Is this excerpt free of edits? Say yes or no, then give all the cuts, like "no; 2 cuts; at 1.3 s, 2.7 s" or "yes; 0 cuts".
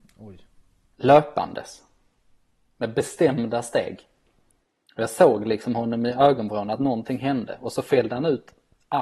yes; 0 cuts